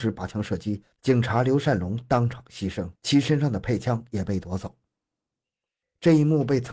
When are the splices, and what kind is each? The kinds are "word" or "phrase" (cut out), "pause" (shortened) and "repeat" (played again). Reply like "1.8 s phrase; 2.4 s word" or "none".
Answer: 3.0 s pause